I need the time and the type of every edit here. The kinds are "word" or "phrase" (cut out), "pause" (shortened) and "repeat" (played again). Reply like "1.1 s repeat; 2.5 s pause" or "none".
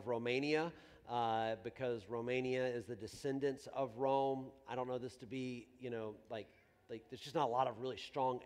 none